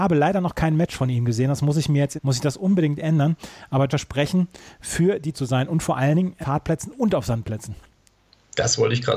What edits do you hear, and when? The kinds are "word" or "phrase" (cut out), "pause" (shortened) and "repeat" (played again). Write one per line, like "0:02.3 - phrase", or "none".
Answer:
0:02.2 - phrase
0:03.9 - phrase
0:05.3 - word
0:06.4 - phrase